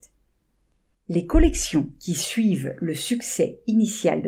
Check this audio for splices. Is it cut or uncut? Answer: uncut